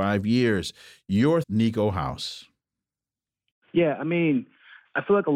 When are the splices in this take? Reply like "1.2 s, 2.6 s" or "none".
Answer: 1.4 s